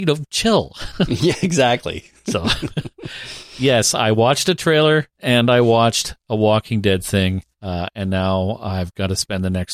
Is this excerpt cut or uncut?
cut